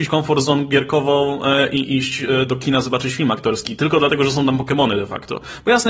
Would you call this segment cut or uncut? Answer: uncut